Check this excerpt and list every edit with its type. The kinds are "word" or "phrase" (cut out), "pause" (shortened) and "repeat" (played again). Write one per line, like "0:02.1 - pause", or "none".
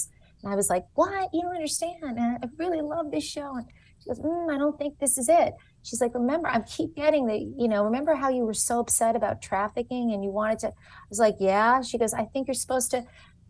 none